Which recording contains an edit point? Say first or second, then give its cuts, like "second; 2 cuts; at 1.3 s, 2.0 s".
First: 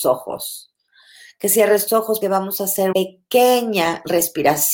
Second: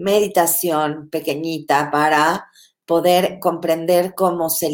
first; 3 cuts; at 1.9 s, 2.2 s, 2.9 s